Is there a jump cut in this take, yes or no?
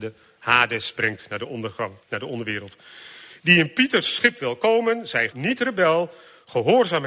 yes